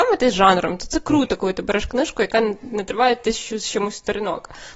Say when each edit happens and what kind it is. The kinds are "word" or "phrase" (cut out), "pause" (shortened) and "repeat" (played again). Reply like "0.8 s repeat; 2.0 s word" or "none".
none

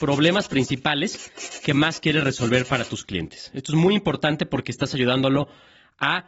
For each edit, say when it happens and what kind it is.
none

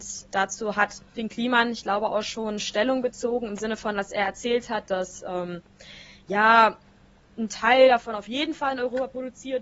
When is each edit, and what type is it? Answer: none

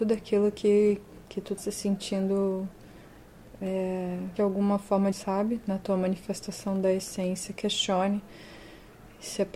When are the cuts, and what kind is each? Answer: 1.2 s pause; 1.6 s word; 4.4 s phrase; 5.1 s phrase

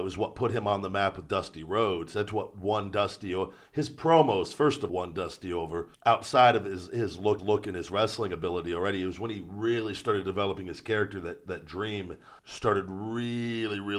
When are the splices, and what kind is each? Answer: 4.9 s word; 5.9 s pause; 7.4 s repeat; 12.4 s pause

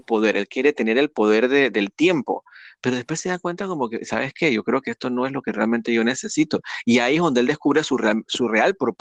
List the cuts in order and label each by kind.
none

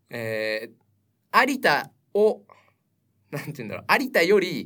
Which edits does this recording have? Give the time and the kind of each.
none

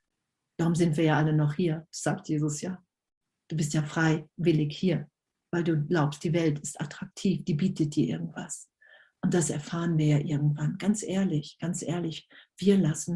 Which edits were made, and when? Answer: none

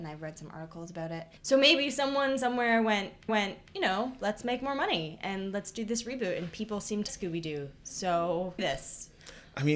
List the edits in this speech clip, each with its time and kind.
1.4 s pause; 3.3 s repeat; 7.1 s word; 8.6 s phrase

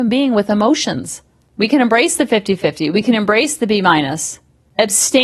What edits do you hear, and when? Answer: none

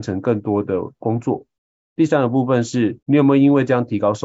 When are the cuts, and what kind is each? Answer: 3.0 s pause

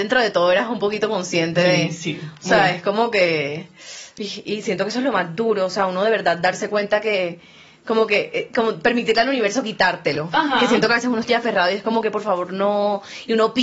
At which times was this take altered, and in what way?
11.3 s word

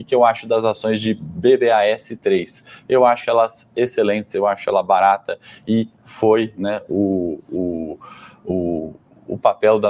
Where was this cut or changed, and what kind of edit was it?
none

